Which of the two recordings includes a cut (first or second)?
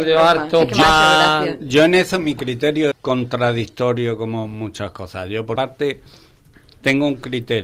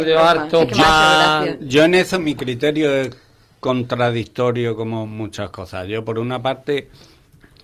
first